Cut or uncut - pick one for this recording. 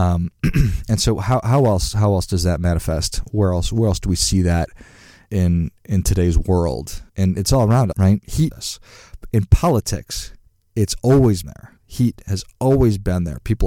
cut